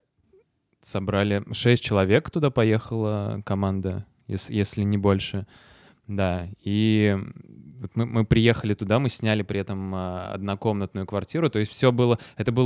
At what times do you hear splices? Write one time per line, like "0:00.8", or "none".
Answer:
none